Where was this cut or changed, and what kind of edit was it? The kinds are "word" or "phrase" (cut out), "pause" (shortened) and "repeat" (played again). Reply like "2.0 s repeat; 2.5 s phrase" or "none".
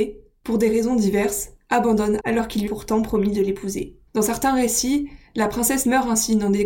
2.2 s word; 2.7 s word; 4.1 s pause